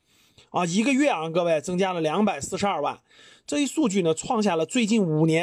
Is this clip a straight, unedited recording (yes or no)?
yes